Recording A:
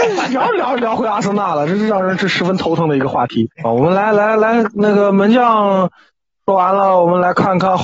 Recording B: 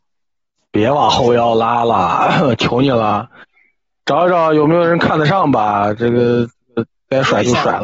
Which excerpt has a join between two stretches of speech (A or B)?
A